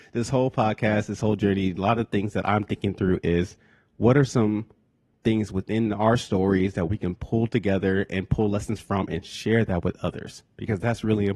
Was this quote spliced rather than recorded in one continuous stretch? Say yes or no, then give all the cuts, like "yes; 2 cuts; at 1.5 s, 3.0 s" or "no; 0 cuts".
no; 0 cuts